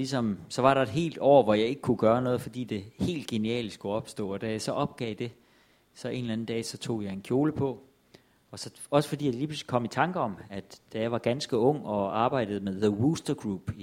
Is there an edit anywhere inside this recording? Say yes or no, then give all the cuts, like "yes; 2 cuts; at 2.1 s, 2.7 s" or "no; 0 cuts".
no; 0 cuts